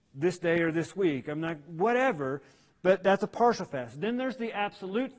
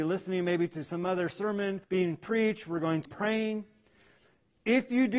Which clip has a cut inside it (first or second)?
second